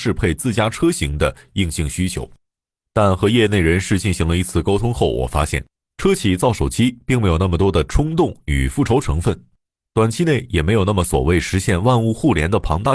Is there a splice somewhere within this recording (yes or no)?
no